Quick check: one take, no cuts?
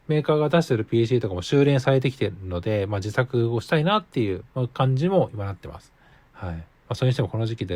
no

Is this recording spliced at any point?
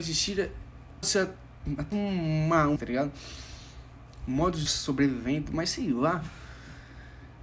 yes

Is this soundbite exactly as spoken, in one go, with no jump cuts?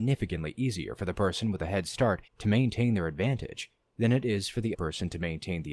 no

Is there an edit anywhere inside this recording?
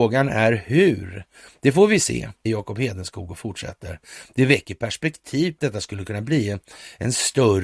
yes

